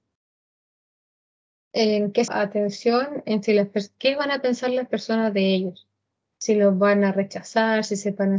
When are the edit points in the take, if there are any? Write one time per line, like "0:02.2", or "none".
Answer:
0:02.3